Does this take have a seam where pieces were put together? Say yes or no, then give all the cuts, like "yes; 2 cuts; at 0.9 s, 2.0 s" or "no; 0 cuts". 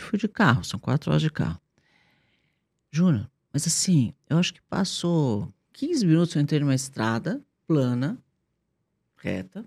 no; 0 cuts